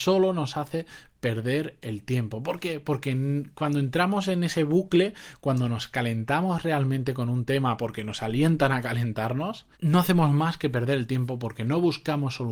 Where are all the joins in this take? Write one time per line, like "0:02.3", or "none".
0:09.7